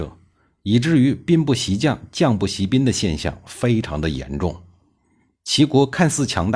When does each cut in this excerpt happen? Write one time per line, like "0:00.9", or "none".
none